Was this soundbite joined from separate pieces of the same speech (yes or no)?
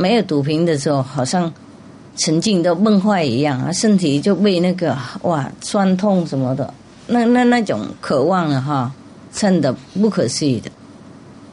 no